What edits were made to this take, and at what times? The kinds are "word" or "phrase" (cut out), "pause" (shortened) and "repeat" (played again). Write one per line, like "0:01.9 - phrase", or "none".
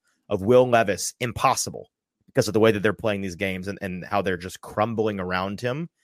none